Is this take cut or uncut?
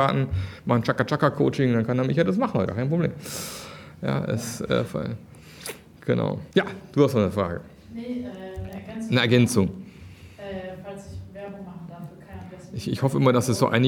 cut